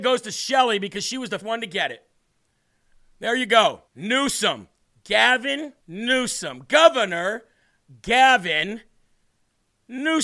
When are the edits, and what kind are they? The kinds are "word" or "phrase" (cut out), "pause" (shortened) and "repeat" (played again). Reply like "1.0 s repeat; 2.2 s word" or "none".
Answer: 1.4 s word; 3.9 s pause; 5.8 s pause